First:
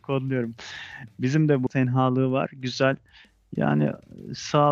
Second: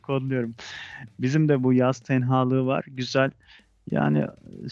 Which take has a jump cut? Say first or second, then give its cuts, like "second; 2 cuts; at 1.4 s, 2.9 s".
first; 1 cut; at 1.7 s